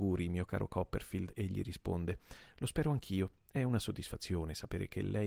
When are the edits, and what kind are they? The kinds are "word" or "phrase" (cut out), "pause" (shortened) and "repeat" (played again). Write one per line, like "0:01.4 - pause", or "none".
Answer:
none